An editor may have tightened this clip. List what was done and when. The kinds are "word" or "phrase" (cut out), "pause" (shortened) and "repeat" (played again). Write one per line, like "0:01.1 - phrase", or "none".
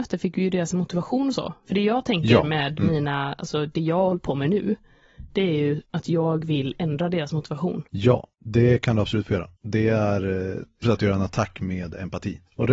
0:08.3 - pause
0:09.6 - pause
0:10.8 - word

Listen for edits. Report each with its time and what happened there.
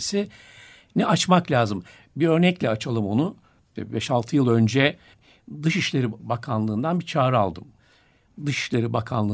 none

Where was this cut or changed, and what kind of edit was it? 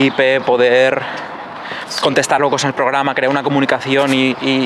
none

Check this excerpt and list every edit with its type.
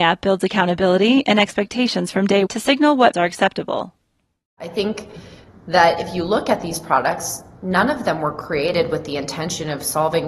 0:02.5 - word
0:03.1 - word

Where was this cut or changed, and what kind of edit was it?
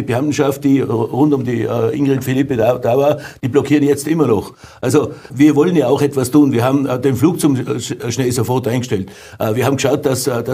0:05.3 - word

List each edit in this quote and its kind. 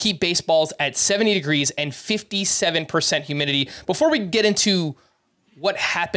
none

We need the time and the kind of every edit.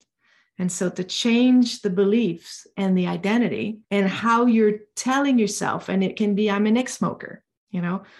0:03.8 - pause

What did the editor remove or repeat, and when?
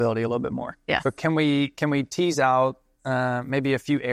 none

